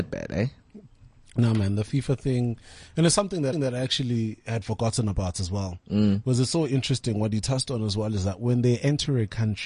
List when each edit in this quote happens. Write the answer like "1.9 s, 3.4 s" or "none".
3.5 s

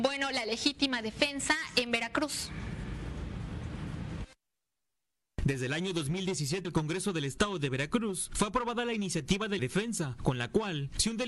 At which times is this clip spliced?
6.6 s, 9.6 s

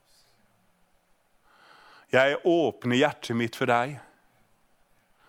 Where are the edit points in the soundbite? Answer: none

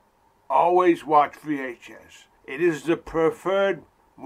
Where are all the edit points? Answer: 2.4 s

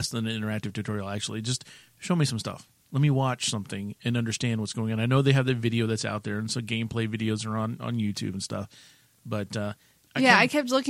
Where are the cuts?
none

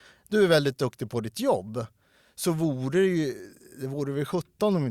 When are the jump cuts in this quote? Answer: none

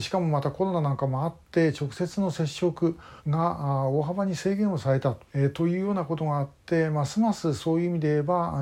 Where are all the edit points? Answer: 3.2 s, 5.3 s

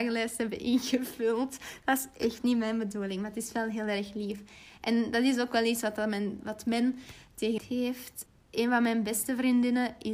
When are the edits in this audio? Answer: 7.6 s

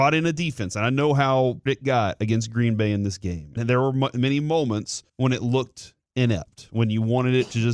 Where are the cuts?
1.7 s, 3.6 s, 5.1 s

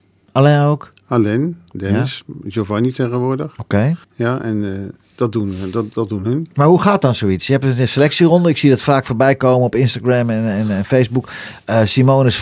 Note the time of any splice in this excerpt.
4.0 s

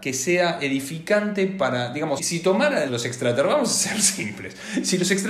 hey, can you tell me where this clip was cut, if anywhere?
2.2 s, 2.9 s

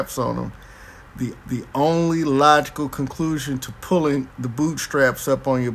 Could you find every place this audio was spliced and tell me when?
1.4 s, 4.3 s

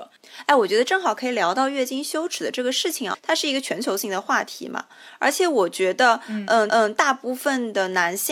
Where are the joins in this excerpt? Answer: 6.7 s

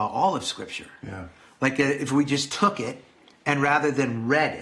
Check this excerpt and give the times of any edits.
none

